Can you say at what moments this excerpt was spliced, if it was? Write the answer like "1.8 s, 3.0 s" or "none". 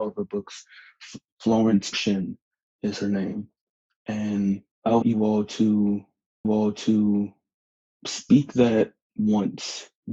1.9 s, 4.7 s, 5.0 s, 6.4 s